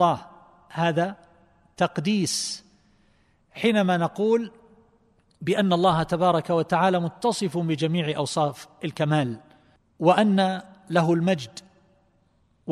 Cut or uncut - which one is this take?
uncut